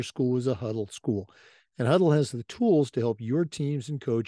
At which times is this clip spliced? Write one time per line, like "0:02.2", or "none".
none